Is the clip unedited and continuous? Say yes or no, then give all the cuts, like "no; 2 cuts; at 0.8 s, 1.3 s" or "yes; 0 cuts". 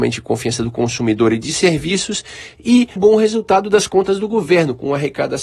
no; 1 cut; at 3.0 s